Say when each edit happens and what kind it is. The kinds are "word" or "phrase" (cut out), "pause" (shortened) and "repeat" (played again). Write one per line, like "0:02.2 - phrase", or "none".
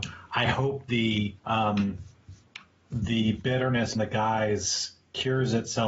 0:01.4 - pause
0:04.0 - word